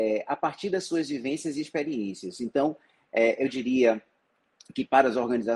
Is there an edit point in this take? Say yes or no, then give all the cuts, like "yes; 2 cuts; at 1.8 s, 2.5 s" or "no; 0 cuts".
no; 0 cuts